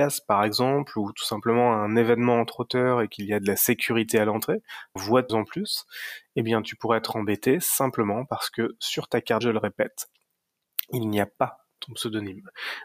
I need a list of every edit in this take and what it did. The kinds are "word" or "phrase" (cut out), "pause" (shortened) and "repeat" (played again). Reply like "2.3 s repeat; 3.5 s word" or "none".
5.0 s phrase; 5.3 s word; 9.4 s word